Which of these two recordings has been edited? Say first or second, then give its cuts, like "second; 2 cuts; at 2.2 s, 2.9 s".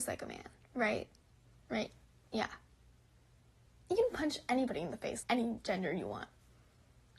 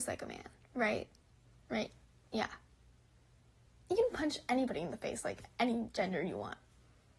first; 1 cut; at 5.2 s